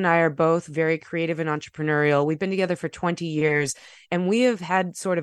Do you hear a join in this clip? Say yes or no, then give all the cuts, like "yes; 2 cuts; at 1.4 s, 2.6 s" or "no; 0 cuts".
no; 0 cuts